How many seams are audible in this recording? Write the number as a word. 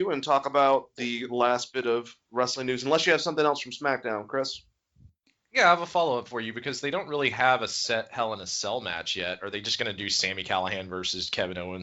zero